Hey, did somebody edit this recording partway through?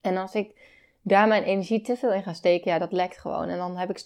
no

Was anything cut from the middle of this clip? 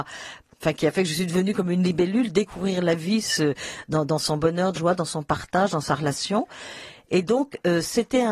yes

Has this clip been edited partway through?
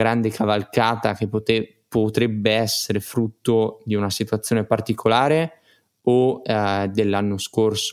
no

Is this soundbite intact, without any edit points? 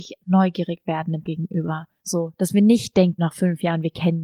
no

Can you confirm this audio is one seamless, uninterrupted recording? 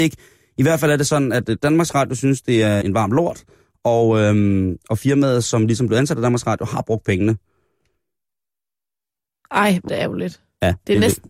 no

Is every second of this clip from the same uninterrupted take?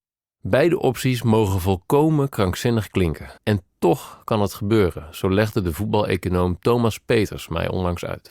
no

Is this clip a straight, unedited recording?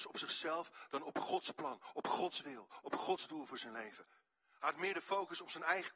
yes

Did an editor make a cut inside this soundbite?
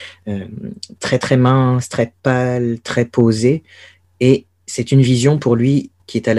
no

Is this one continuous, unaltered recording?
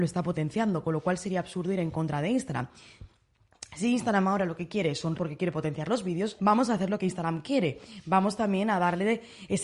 no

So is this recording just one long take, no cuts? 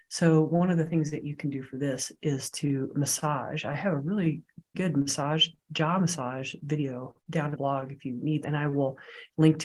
no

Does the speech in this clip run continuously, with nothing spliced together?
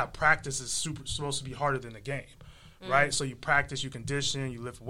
yes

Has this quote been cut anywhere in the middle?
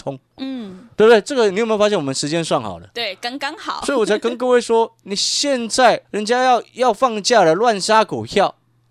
yes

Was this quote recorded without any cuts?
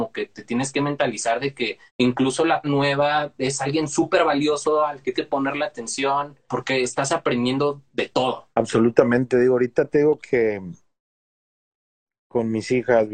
no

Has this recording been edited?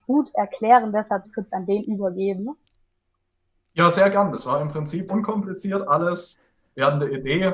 yes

